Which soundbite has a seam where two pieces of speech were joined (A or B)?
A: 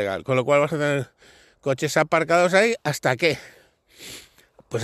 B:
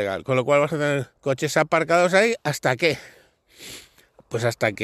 B